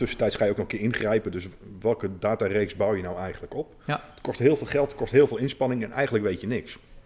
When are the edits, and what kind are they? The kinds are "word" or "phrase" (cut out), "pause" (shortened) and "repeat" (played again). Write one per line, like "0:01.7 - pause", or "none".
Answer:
none